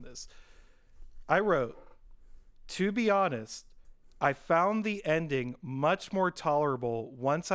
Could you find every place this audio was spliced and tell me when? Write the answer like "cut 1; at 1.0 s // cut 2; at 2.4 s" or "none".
none